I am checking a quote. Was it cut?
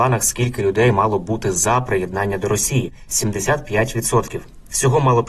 no; 0 cuts

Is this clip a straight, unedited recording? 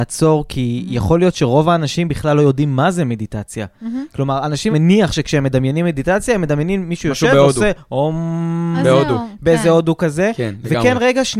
no; 1 cut; at 4.7 s

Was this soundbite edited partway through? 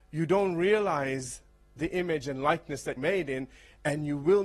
yes; 1 cut; at 3.0 s

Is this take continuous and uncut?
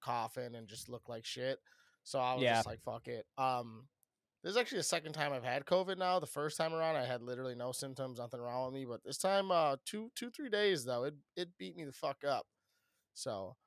yes; 0 cuts

